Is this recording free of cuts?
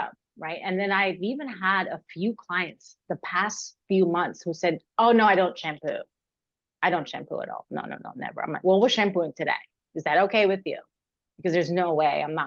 yes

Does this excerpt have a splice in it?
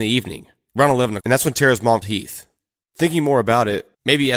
yes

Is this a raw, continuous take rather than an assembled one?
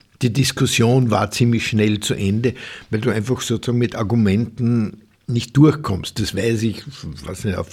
yes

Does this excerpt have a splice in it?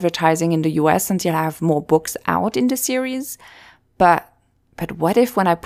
no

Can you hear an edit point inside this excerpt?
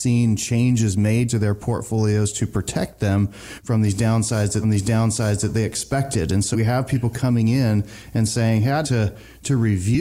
yes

